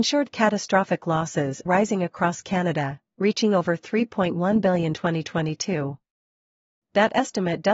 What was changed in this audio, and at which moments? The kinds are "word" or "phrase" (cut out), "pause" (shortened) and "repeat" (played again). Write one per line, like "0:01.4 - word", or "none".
0:01.7 - word
0:04.9 - word